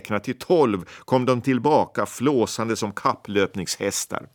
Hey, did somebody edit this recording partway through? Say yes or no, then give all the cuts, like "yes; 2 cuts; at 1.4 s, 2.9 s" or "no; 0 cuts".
no; 0 cuts